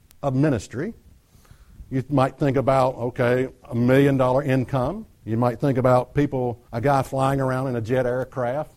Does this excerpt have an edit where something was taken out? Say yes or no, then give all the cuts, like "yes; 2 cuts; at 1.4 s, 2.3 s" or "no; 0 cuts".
yes; 2 cuts; at 5.1 s, 6.7 s